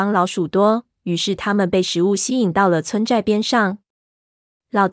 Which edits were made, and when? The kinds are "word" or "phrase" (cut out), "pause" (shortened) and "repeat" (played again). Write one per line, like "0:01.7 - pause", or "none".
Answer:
none